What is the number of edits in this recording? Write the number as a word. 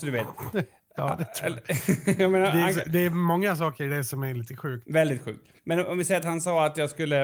one